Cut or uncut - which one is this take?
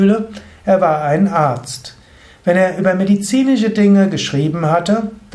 uncut